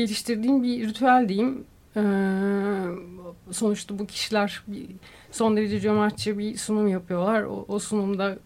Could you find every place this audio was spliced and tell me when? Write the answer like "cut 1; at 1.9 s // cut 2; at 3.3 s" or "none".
none